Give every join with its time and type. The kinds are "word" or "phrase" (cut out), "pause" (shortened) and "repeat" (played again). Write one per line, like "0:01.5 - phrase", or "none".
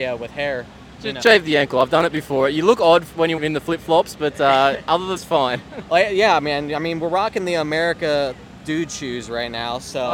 0:01.2 - word
0:03.4 - word
0:05.2 - word